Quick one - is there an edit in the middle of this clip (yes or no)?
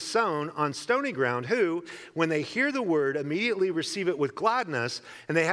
no